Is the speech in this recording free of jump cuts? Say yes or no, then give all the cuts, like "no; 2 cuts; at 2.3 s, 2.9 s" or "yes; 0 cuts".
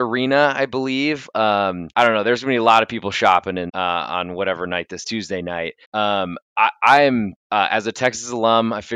no; 5 cuts; at 1.9 s, 3.7 s, 5.0 s, 5.8 s, 7.4 s